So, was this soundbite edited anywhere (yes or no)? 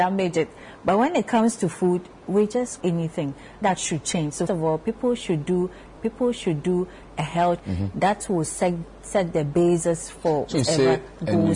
yes